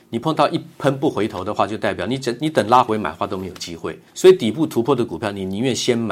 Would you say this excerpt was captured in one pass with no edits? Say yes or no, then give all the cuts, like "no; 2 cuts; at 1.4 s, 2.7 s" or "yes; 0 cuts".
no; 1 cut; at 4.1 s